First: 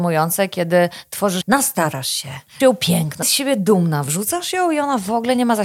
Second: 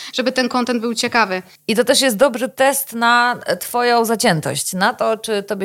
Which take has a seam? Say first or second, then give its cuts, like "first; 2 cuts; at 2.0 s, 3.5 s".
first; 3 cuts; at 1.4 s, 2.6 s, 3.2 s